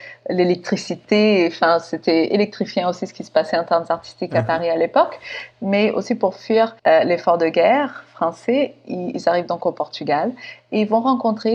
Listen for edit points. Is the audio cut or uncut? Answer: cut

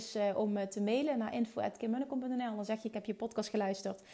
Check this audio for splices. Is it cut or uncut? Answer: uncut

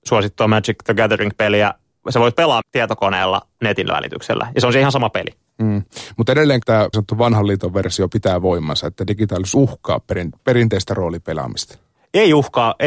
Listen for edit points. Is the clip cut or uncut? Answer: cut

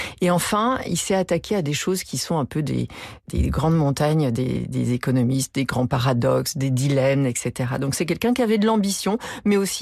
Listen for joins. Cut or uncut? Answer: uncut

